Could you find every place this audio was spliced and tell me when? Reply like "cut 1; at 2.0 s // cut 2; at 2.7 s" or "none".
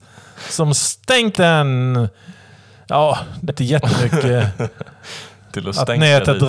cut 1; at 1.3 s // cut 2; at 3.5 s

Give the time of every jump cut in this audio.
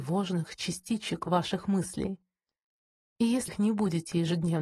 cut 1; at 3.5 s

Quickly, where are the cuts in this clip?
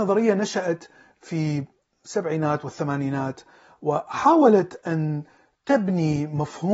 none

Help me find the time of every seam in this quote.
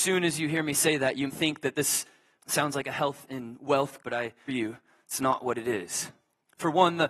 cut 1; at 1.3 s // cut 2; at 2.4 s // cut 3; at 4.0 s // cut 4; at 4.5 s

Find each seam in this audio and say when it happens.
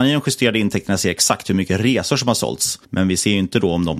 cut 1; at 2.8 s

